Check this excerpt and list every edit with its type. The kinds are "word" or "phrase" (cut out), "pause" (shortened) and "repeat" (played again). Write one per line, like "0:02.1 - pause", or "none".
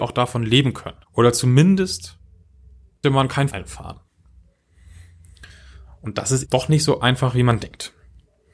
0:01.0 - pause
0:03.0 - word
0:03.5 - word
0:06.4 - word